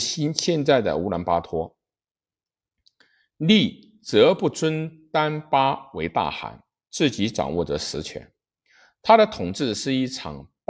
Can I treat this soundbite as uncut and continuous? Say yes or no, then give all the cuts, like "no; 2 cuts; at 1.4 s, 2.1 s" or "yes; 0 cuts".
yes; 0 cuts